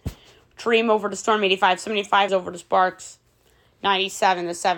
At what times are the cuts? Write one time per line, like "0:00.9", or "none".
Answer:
0:02.3